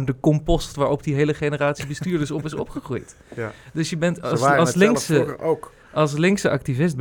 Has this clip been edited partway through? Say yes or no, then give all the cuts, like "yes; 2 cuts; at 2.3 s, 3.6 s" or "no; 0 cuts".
no; 0 cuts